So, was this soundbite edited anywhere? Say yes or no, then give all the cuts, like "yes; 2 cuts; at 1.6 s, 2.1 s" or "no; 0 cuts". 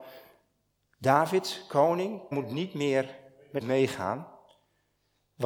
yes; 2 cuts; at 2.3 s, 3.6 s